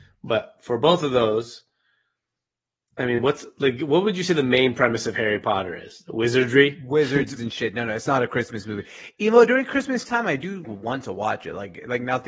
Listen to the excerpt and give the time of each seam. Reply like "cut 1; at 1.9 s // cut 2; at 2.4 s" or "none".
cut 1; at 7.4 s // cut 2; at 10.6 s